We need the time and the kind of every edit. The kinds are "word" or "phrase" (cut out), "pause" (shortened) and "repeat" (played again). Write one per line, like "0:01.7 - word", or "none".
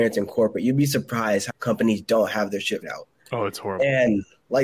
0:01.5 - word
0:02.8 - word